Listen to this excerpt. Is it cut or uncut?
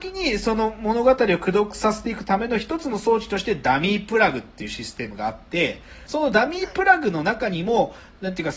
cut